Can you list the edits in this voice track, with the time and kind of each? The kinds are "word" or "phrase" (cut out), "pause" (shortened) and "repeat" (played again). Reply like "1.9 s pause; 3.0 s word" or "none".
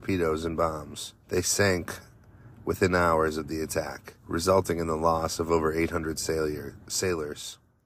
1.2 s pause; 4.2 s pause